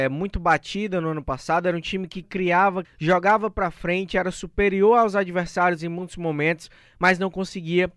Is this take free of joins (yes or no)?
no